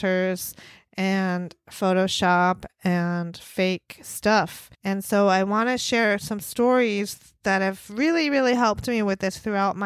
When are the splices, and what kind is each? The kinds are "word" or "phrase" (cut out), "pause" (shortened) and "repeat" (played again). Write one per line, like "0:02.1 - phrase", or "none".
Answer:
0:04.7 - pause